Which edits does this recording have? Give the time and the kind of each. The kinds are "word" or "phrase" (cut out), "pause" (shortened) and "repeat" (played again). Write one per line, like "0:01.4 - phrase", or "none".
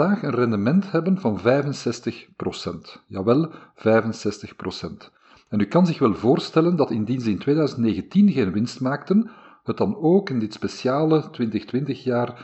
none